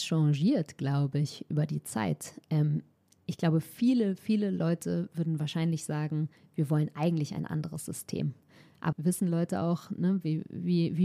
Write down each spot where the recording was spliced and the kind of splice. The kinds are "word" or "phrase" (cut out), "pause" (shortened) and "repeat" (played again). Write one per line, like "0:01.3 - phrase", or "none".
0:08.9 - word

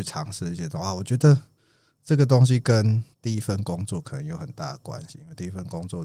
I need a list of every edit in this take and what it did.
0:03.1 - pause

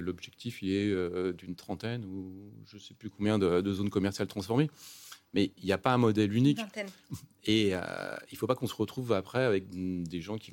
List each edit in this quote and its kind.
none

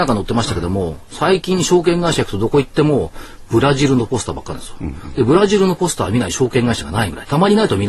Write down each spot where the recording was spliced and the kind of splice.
none

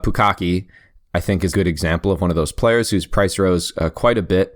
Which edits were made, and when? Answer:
0:01.5 - phrase

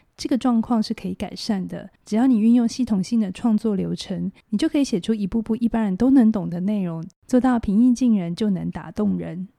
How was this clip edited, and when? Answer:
0:02.0 - pause
0:04.4 - pause
0:07.2 - pause

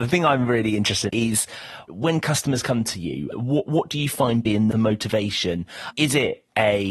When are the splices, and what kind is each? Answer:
0:01.1 - phrase
0:03.3 - word
0:04.7 - phrase

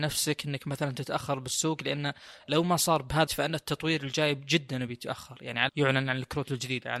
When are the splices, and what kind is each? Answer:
0:03.3 - word
0:05.7 - word

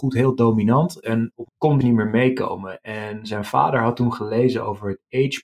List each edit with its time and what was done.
0:01.5 - phrase
0:01.8 - word

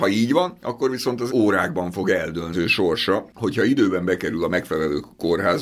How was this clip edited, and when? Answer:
0:01.3 - word
0:02.5 - word

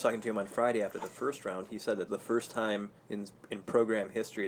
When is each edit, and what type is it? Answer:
0:02.1 - phrase
0:03.0 - pause

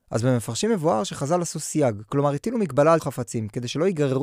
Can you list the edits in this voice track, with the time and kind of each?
0:03.0 - word

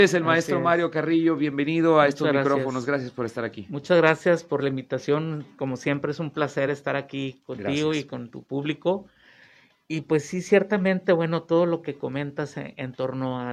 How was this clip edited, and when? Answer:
none

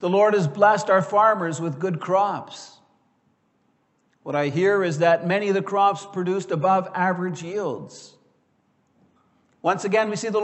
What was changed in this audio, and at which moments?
none

